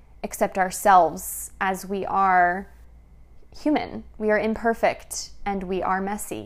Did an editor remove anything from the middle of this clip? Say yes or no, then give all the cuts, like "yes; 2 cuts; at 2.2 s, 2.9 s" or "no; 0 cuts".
no; 0 cuts